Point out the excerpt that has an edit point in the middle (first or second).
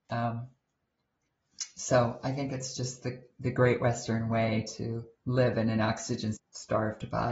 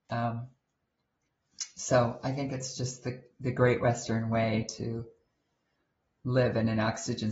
first